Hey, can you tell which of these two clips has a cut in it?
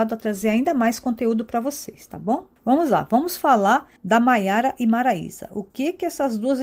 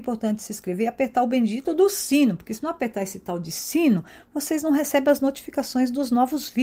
first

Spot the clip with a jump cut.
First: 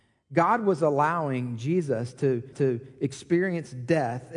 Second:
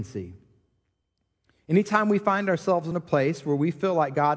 first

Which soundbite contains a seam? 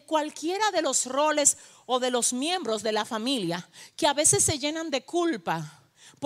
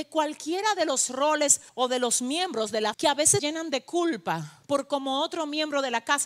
second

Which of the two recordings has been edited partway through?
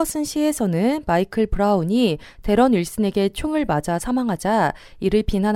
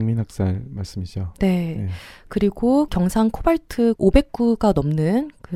second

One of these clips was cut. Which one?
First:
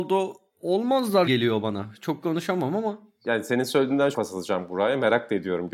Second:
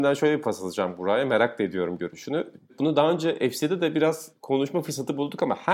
first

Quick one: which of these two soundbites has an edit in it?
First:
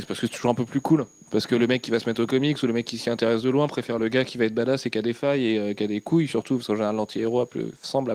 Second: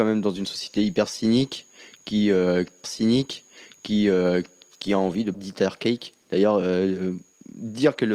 second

